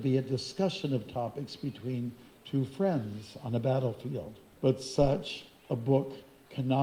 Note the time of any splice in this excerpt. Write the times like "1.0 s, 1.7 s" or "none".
4.5 s